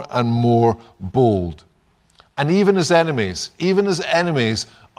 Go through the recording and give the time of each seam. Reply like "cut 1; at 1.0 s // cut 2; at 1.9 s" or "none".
none